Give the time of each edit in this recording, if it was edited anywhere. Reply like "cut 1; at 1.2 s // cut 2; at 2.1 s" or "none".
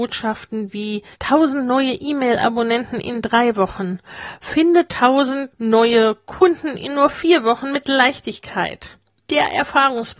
cut 1; at 1.1 s